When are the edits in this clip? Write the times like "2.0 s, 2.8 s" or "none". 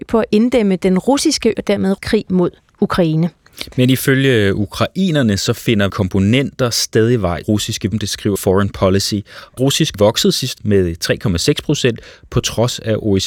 1.5 s, 2.0 s, 5.9 s, 7.4 s, 7.9 s, 8.4 s, 9.6 s, 9.9 s, 10.6 s